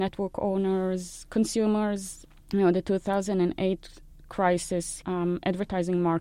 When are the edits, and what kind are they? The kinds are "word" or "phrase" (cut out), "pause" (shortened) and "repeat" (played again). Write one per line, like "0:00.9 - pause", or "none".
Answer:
0:05.0 - phrase

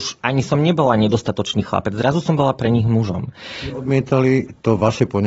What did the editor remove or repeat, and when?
none

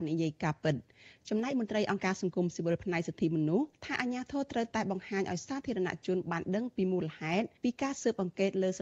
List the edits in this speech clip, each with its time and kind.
0:03.7 - pause
0:07.6 - pause

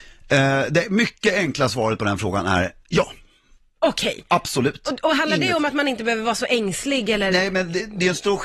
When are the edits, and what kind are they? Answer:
none

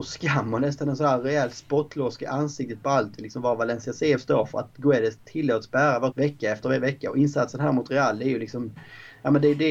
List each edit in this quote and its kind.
0:06.1 - word

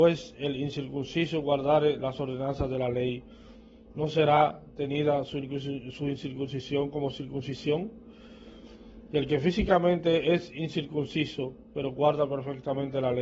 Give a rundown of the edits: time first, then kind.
none

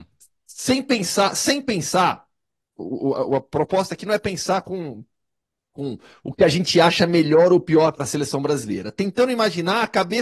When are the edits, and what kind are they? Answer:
none

